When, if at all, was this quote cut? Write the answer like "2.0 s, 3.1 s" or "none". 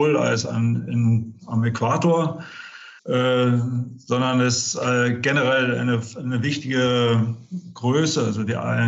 3.0 s